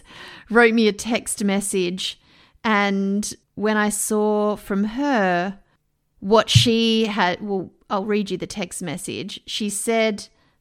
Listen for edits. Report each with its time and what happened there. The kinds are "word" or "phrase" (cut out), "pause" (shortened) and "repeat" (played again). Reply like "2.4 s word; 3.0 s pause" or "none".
3.4 s pause; 5.8 s pause